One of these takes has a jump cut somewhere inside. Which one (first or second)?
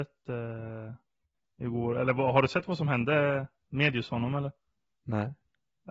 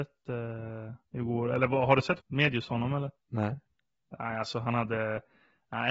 second